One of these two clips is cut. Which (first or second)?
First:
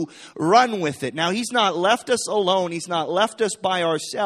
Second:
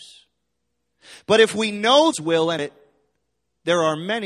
second